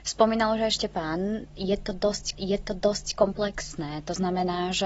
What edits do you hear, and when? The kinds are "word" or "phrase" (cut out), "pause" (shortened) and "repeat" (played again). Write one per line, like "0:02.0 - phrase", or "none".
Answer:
0:02.3 - repeat

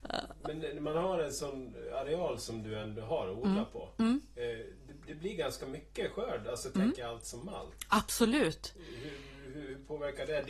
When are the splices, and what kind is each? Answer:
none

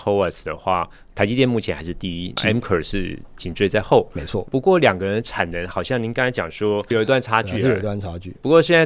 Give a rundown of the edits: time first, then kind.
0:02.4 - word

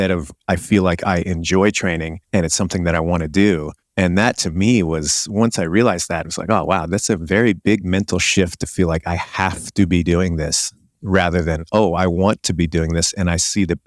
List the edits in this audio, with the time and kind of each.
0:02.2 - pause
0:03.8 - pause

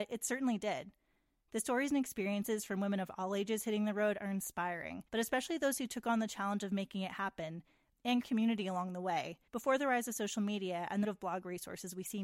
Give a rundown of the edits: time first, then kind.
0:05.1 - pause
0:08.2 - word
0:09.5 - pause
0:11.0 - word

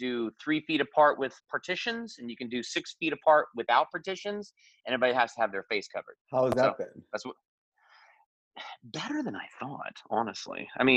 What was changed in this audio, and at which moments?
0:01.4 - word
0:06.2 - pause

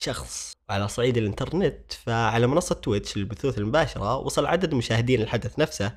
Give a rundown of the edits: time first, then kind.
none

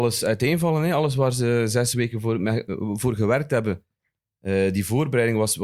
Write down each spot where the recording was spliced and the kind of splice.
none

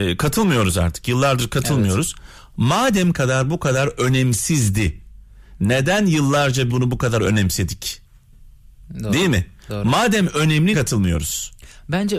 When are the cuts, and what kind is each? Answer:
0:03.1 - word
0:06.7 - word
0:10.7 - word

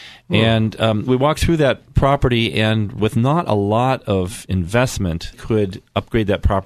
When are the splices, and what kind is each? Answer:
0:01.1 - word
0:03.0 - word
0:05.3 - word

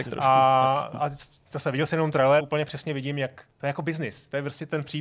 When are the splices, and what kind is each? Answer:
0:02.4 - word
0:03.5 - pause

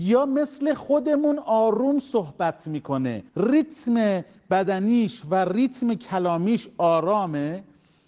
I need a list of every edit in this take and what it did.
0:03.3 - pause

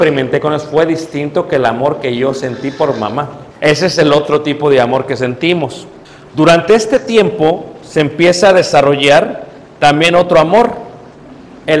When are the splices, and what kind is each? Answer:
0:03.5 - pause
0:06.0 - pause

